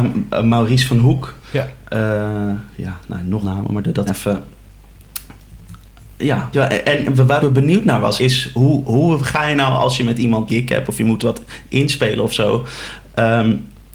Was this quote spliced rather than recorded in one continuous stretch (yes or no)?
yes